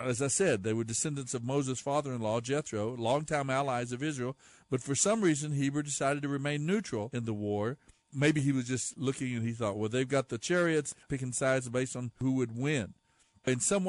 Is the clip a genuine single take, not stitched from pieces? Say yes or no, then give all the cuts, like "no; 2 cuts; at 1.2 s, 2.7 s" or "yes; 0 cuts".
no; 1 cut; at 11.0 s